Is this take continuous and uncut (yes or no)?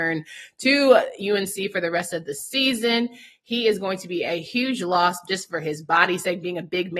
yes